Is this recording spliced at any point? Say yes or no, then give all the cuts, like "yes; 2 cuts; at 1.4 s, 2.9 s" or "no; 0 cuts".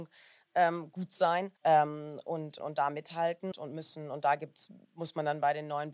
yes; 4 cuts; at 1.6 s, 2.6 s, 3.5 s, 4.8 s